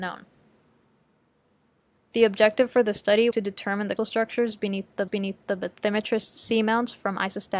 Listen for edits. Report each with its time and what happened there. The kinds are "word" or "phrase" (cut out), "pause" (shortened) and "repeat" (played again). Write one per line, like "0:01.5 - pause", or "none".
0:03.3 - word
0:04.0 - word
0:05.1 - repeat